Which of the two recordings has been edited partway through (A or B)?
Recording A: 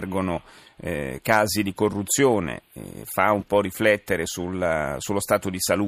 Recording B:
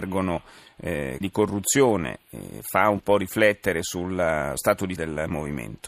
B